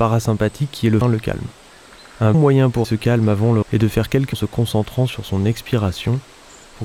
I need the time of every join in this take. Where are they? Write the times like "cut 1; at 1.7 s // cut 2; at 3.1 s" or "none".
cut 1; at 1.0 s // cut 2; at 2.3 s // cut 3; at 2.8 s // cut 4; at 3.6 s // cut 5; at 4.3 s